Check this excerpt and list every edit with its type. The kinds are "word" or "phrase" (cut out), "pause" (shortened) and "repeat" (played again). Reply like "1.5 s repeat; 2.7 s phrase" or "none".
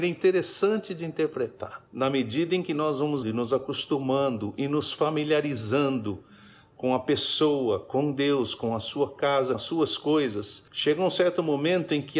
1.9 s pause; 3.2 s word; 9.5 s word; 10.7 s pause